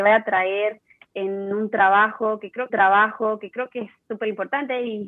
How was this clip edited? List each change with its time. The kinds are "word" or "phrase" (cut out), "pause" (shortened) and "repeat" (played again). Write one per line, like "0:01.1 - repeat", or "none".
0:02.7 - repeat